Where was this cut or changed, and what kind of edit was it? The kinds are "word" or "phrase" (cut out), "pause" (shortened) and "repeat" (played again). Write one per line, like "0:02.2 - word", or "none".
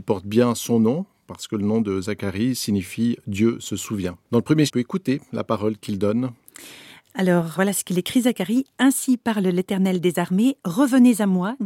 0:04.2 - pause
0:04.7 - phrase
0:07.6 - word